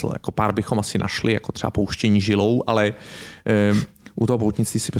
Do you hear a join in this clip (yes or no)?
no